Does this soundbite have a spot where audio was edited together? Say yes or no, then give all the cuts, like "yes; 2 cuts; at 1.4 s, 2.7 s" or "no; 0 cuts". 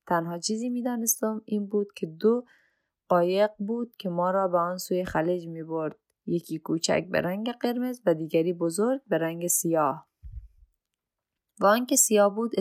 no; 0 cuts